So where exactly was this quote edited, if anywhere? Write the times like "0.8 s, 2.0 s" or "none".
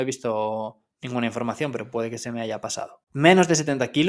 0.9 s, 3.0 s